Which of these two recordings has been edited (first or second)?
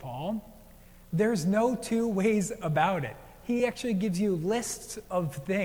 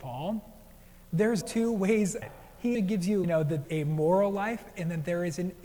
second